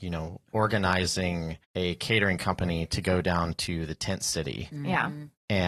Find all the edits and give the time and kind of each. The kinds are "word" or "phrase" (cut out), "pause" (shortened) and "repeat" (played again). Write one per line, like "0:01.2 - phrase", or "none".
0:01.6 - pause